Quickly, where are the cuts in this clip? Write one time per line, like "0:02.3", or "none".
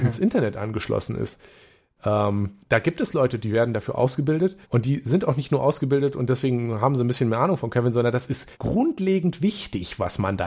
0:02.6
0:04.6
0:08.5